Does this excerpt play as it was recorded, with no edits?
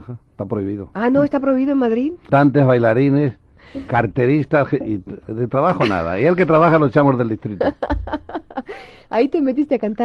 yes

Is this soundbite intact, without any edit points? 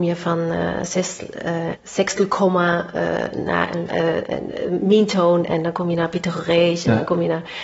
no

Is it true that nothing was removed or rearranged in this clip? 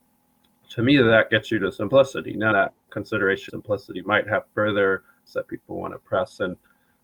no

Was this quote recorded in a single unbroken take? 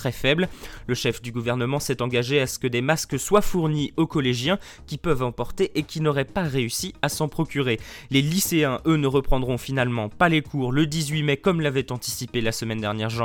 yes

